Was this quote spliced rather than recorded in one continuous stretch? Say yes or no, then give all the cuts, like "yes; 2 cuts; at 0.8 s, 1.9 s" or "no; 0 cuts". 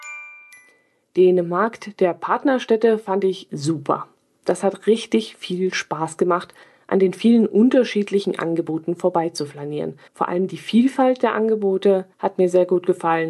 yes; 4 cuts; at 3.5 s, 6.6 s, 10.1 s, 12.1 s